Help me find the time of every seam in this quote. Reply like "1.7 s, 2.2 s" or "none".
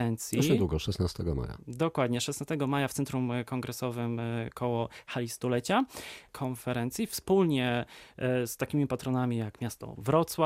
none